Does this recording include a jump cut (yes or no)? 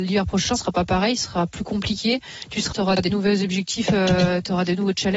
yes